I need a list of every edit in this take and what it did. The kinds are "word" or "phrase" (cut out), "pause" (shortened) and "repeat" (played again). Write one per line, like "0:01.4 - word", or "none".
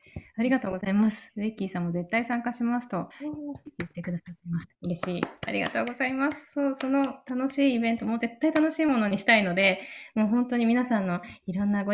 0:01.3 - pause
0:03.1 - pause
0:04.7 - pause